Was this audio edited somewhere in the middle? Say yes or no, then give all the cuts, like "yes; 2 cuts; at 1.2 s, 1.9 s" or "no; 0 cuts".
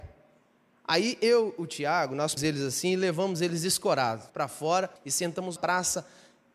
yes; 4 cuts; at 2.4 s, 4.3 s, 5.0 s, 5.6 s